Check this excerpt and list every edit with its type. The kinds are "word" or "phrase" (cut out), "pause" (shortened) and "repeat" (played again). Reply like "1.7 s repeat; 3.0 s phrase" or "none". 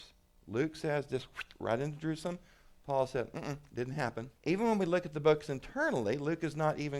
4.4 s pause